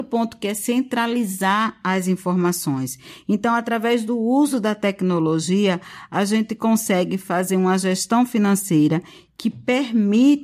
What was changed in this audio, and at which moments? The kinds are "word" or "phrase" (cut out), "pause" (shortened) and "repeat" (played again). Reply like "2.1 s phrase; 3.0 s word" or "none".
none